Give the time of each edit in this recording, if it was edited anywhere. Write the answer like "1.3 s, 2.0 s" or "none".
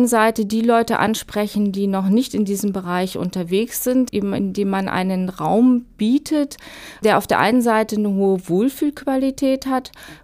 none

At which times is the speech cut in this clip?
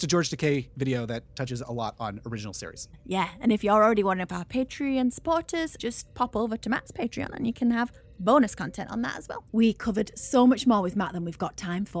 5.8 s, 9.5 s

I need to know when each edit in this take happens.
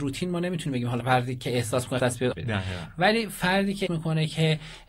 1.0 s, 2.0 s, 2.3 s, 3.9 s

